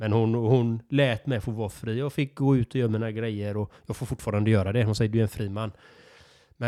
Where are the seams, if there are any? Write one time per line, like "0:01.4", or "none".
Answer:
none